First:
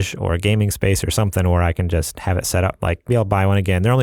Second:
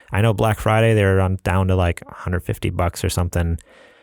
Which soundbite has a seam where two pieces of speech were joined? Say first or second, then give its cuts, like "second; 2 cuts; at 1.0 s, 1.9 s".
first; 1 cut; at 3.1 s